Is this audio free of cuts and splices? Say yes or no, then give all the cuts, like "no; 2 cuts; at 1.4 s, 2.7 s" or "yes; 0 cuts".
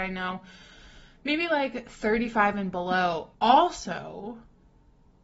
no; 1 cut; at 3.3 s